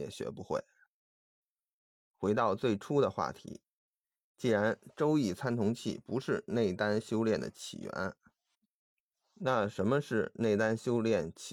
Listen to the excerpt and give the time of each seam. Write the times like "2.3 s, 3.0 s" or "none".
none